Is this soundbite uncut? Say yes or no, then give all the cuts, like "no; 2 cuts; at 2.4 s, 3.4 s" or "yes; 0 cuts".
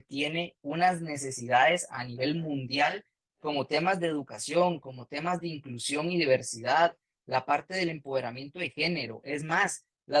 yes; 0 cuts